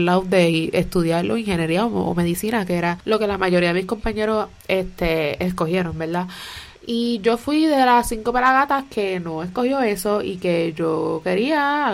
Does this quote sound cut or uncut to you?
cut